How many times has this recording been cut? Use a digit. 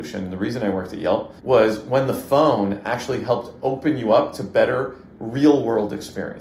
1